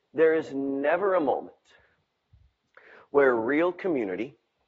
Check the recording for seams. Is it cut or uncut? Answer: uncut